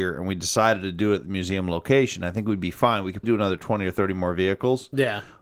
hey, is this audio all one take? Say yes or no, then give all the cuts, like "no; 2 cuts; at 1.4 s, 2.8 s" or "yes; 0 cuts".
no; 1 cut; at 3.2 s